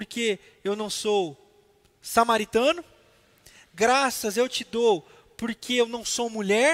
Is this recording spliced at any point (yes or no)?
no